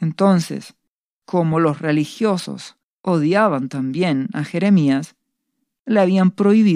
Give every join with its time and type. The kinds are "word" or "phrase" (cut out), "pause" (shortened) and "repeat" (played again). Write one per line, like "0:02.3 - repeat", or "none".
none